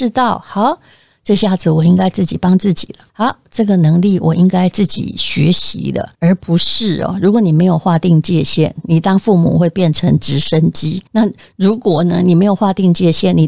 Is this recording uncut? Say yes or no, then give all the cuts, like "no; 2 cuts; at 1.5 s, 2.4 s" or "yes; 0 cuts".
no; 3 cuts; at 3.1 s, 6.1 s, 11.1 s